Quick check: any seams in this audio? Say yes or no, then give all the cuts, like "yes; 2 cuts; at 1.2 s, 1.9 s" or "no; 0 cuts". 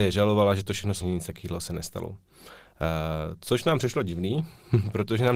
yes; 1 cut; at 1.0 s